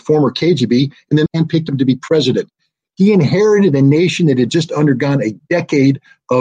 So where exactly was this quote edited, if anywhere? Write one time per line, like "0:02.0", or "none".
0:01.3